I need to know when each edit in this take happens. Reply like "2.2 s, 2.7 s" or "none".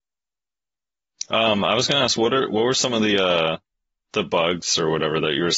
3.7 s